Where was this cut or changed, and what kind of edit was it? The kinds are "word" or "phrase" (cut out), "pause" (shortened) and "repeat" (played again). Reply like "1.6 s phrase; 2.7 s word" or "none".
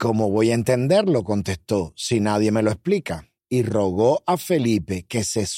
3.4 s pause